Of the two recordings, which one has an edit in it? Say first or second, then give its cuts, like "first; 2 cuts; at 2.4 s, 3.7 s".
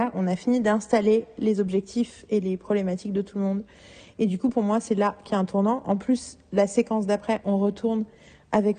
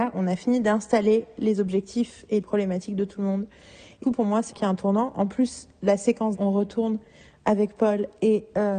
second; 4 cuts; at 2.4 s, 4.0 s, 4.5 s, 6.3 s